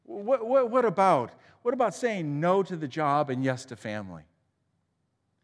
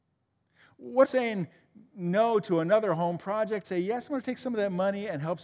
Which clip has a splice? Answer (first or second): second